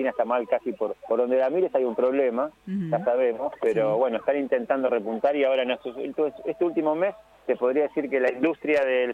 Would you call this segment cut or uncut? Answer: cut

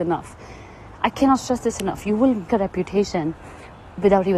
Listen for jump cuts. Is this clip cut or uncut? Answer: cut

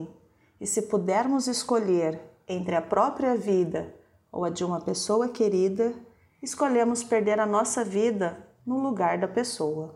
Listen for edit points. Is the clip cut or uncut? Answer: uncut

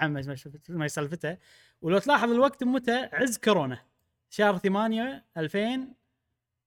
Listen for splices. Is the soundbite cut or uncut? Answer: uncut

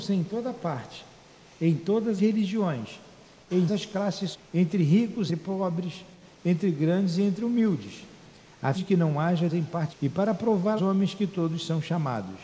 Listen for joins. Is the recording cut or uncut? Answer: cut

